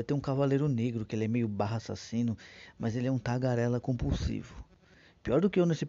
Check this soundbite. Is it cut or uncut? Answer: uncut